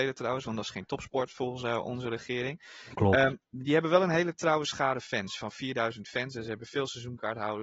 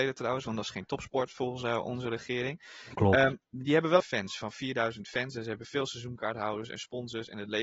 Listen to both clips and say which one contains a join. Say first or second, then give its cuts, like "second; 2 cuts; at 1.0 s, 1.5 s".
second; 1 cut; at 4.0 s